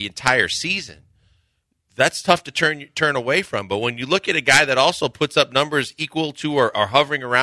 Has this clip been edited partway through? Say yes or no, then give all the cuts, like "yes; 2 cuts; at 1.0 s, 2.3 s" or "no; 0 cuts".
no; 0 cuts